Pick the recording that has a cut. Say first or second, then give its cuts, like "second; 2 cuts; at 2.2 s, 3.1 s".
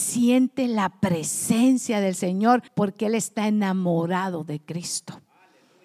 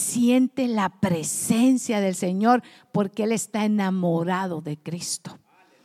first; 1 cut; at 2.7 s